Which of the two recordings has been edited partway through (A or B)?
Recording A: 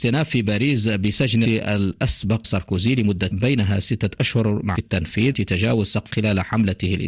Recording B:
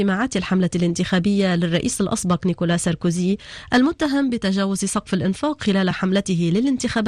A